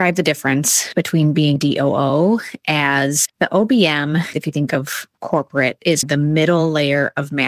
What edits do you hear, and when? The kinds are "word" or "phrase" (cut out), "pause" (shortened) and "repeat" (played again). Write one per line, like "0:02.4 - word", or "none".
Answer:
0:01.6 - phrase
0:04.3 - word
0:06.0 - word